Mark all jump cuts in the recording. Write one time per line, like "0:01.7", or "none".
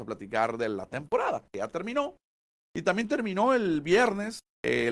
none